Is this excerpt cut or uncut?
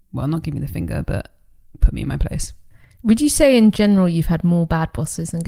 uncut